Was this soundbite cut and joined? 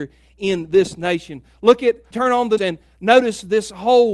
yes; 2 cuts; at 2.1 s, 2.6 s

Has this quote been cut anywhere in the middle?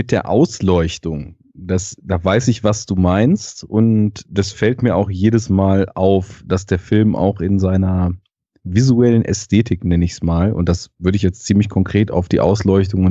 no; 0 cuts

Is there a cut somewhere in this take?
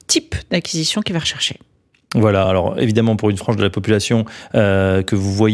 no; 0 cuts

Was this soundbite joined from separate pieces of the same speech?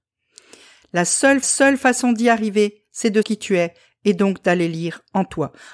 yes; 2 cuts; at 1.4 s, 3.2 s

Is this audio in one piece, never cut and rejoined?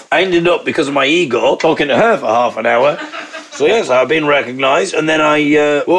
yes; 0 cuts

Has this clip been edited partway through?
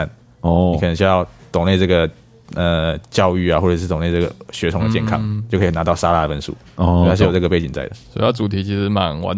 no; 0 cuts

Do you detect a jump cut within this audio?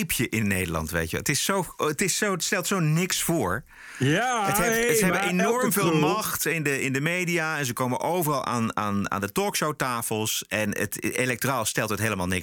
no; 0 cuts

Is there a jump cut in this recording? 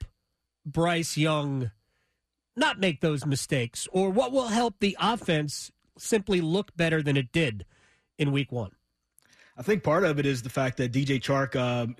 no; 0 cuts

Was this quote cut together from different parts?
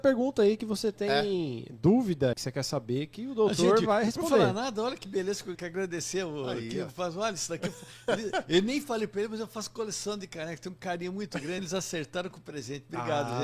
yes; 3 cuts; at 2.3 s, 5.5 s, 11.6 s

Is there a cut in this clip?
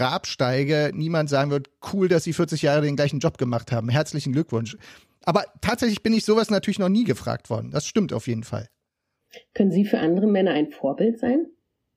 no; 0 cuts

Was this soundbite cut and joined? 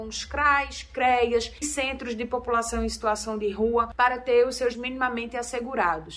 yes; 2 cuts; at 1.6 s, 4.7 s

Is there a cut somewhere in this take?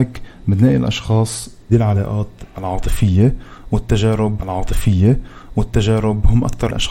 yes; 2 cuts; at 1.7 s, 4.4 s

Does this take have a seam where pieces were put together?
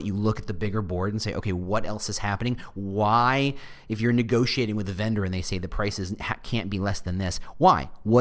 no; 0 cuts

